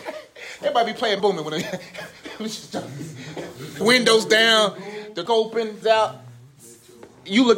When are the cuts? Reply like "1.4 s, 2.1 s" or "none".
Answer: 1.2 s, 3.8 s, 5.3 s, 5.8 s